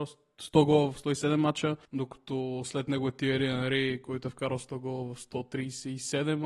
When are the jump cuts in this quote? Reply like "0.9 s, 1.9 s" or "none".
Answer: 1.8 s